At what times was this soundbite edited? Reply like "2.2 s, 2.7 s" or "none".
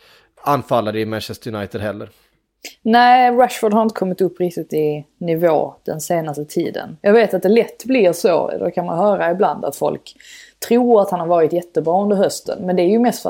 none